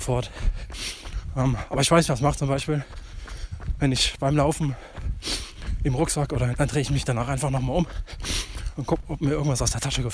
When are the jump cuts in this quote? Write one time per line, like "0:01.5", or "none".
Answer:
0:02.1
0:06.5